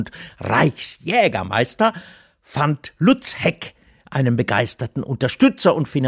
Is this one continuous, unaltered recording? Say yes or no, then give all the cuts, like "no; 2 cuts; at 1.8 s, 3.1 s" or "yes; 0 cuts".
yes; 0 cuts